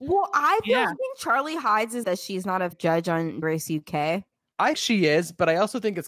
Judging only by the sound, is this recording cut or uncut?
cut